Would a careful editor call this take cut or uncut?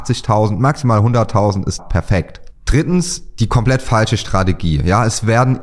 cut